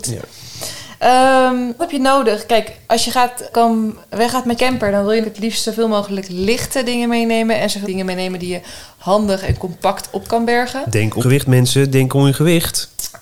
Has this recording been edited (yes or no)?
yes